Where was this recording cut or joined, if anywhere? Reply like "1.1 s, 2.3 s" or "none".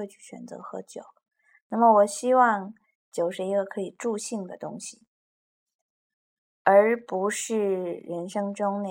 none

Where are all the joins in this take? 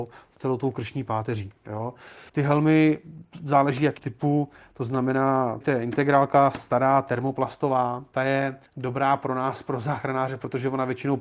2.3 s, 4.0 s, 5.6 s, 8.7 s

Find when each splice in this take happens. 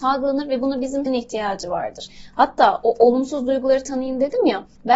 1.1 s

